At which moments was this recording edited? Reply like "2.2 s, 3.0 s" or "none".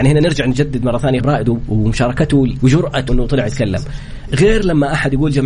1.2 s, 2.6 s, 3.1 s